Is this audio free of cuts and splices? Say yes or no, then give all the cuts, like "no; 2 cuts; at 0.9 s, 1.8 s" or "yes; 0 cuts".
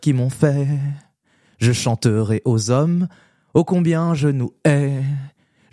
yes; 0 cuts